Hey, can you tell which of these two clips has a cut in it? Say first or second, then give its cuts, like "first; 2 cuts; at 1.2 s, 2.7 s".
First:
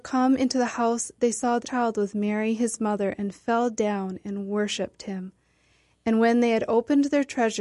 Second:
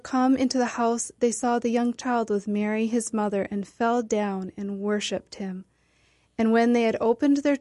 first; 1 cut; at 1.6 s